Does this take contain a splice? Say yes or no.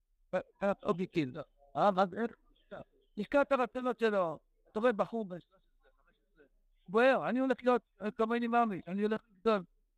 no